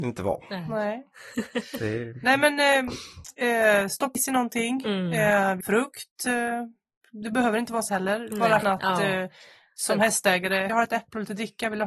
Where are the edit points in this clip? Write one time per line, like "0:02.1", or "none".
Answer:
0:04.2
0:05.6
0:07.9
0:08.6
0:10.7